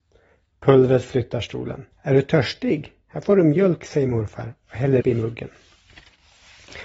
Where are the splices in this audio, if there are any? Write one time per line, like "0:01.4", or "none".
0:01.9
0:05.0

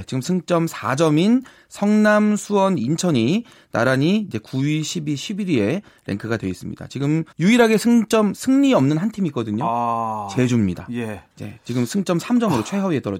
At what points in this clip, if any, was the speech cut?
0:07.3
0:11.3

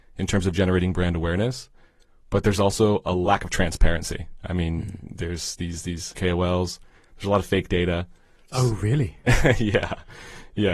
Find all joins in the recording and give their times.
0:06.1

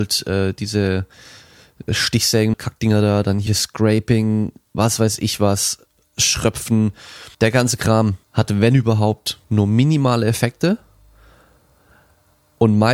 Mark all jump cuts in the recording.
0:02.5
0:03.5
0:04.7
0:07.3
0:08.2
0:09.4

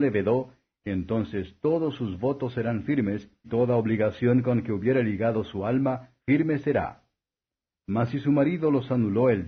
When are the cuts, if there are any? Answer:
0:03.4
0:06.2

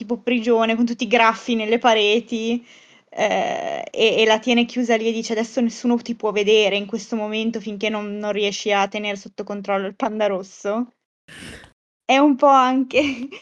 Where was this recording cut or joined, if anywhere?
none

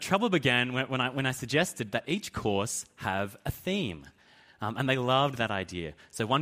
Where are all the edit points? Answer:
none

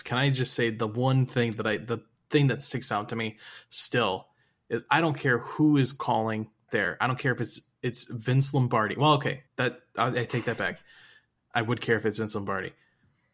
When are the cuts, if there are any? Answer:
0:06.7
0:09.5

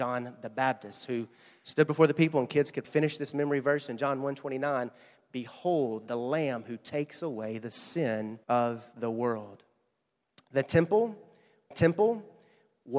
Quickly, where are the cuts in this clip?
0:02.8
0:08.4
0:11.7

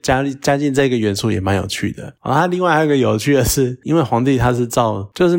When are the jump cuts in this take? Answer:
0:03.8

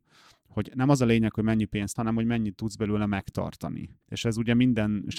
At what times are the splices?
0:02.0
0:04.0

